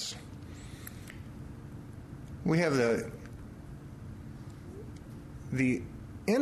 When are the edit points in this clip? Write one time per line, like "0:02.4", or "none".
none